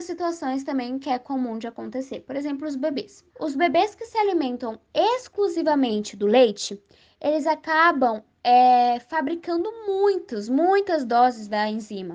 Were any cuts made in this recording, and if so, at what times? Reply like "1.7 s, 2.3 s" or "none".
3.3 s